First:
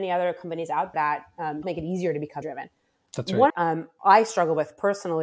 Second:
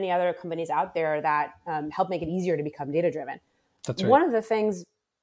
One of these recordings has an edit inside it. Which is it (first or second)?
first